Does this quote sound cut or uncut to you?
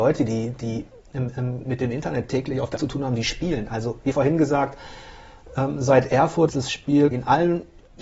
cut